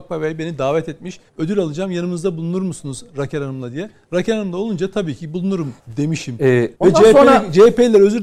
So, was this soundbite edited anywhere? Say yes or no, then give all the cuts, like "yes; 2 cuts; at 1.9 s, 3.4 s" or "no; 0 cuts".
yes; 3 cuts; at 1.3 s, 5.8 s, 6.7 s